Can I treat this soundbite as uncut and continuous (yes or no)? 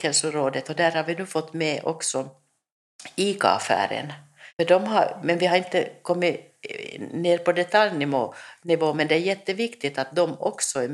no